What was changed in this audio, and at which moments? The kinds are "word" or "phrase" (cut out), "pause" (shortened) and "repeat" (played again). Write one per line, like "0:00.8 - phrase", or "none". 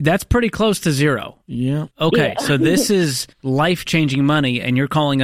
0:01.9 - pause
0:03.3 - pause